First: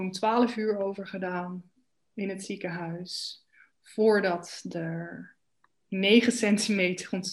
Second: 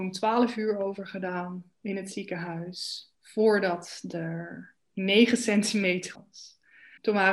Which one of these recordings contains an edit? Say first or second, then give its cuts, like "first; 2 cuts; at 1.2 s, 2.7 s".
second; 4 cuts; at 1.7 s, 3.1 s, 4.8 s, 6.1 s